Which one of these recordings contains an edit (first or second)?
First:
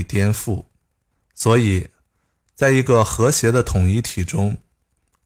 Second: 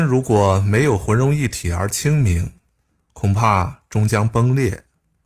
first